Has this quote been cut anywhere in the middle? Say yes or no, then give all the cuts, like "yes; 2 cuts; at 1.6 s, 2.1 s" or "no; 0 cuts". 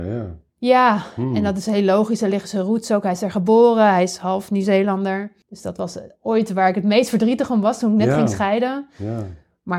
yes; 1 cut; at 5.4 s